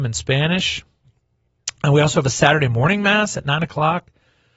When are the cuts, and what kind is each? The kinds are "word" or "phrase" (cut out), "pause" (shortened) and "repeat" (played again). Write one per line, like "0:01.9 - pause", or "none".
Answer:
none